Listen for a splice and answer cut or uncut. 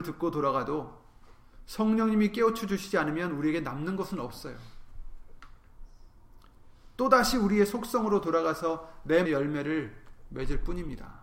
cut